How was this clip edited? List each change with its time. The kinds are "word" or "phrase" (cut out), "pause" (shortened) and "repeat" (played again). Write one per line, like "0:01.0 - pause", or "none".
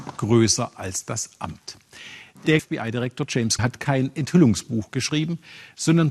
0:02.6 - word
0:03.6 - word